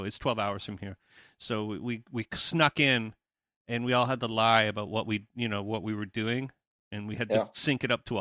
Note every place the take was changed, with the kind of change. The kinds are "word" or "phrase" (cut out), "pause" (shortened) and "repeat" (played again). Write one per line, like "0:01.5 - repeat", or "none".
none